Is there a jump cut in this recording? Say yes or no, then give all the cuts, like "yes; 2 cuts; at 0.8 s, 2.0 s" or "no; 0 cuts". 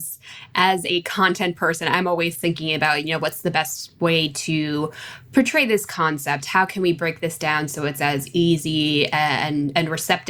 no; 0 cuts